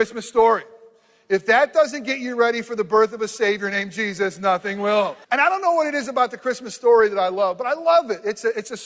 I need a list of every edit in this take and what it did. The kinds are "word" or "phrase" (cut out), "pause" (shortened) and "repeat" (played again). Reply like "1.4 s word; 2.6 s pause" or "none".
5.2 s pause